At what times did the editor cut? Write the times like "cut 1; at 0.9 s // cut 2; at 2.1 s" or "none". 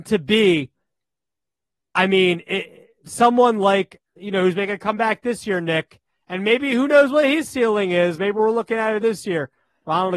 cut 1; at 4.2 s